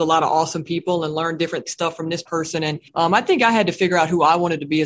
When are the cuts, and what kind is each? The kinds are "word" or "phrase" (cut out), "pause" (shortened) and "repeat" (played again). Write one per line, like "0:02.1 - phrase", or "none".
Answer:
0:01.7 - phrase
0:02.3 - phrase
0:02.9 - pause